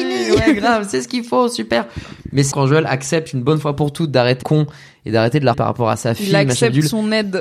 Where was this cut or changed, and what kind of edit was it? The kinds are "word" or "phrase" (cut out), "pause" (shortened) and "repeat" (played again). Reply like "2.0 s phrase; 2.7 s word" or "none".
2.5 s word; 4.4 s word; 5.5 s word